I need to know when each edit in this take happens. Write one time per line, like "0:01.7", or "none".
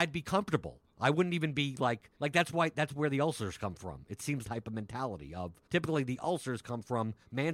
0:02.2
0:04.4
0:05.7